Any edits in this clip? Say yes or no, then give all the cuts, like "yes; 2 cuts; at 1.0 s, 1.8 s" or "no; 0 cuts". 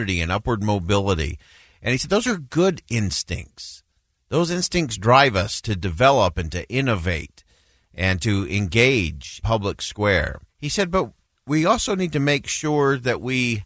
yes; 3 cuts; at 5.6 s, 9.4 s, 10.5 s